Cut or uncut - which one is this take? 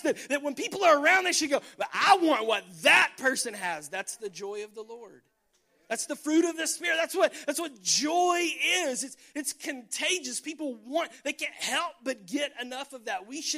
uncut